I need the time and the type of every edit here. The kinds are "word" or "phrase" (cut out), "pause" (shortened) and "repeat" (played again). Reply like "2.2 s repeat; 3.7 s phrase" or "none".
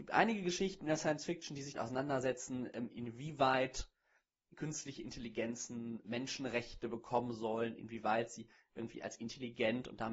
1.7 s word; 6.0 s word